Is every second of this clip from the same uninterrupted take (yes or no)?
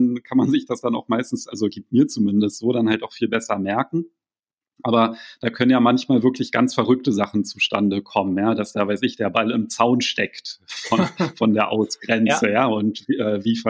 yes